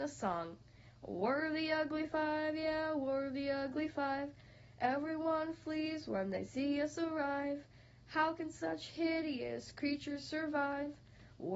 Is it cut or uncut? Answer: uncut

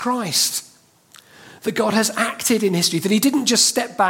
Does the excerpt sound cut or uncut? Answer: uncut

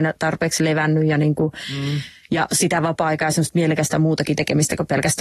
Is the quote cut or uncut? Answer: uncut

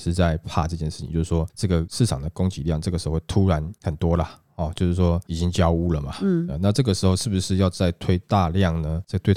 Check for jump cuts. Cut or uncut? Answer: uncut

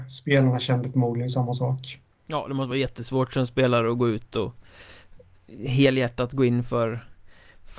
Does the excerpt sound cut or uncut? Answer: uncut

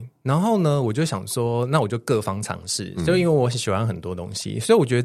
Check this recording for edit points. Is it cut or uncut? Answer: uncut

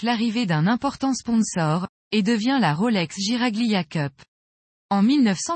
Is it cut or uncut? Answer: uncut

